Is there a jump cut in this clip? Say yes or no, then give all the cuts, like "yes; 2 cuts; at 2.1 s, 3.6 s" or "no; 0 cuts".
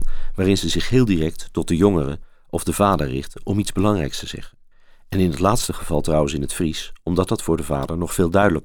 yes; 1 cut; at 4.7 s